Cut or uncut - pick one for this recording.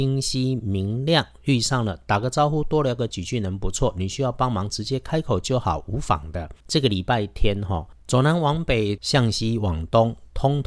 cut